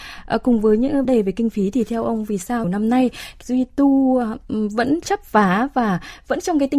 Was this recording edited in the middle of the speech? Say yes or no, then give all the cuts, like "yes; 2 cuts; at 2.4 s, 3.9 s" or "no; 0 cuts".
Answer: yes; 3 cuts; at 1.0 s, 2.6 s, 3.4 s